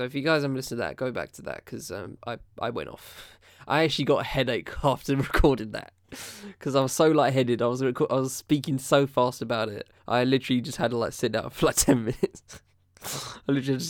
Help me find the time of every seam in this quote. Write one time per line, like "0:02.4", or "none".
0:02.2
0:10.0